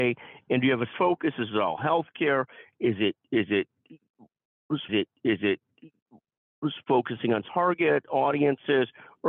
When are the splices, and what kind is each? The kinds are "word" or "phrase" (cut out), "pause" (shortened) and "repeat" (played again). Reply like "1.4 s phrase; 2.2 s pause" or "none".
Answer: 0.9 s word; 4.9 s repeat; 7.5 s word